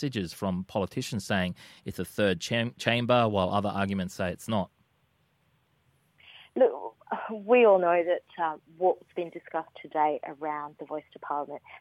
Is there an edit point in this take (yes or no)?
yes